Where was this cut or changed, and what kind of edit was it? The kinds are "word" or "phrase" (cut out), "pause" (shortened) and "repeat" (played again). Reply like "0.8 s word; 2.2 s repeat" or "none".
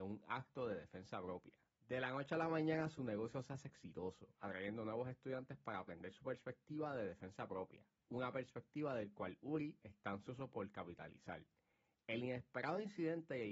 none